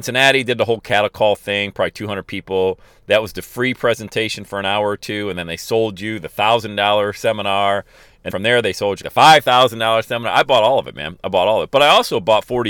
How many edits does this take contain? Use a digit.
2